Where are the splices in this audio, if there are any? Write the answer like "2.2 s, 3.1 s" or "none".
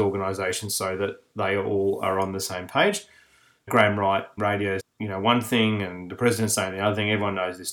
3.7 s, 4.4 s, 4.8 s